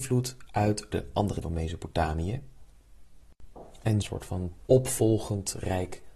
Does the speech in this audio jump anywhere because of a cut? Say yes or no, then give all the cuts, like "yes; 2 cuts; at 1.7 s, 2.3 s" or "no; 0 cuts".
yes; 4 cuts; at 0.9 s, 1.4 s, 4.0 s, 4.7 s